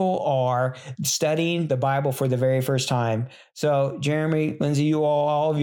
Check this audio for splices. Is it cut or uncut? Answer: uncut